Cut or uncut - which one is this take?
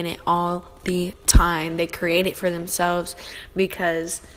uncut